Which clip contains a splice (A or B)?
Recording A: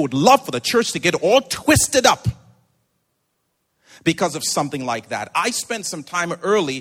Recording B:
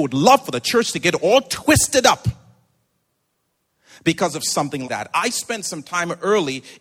B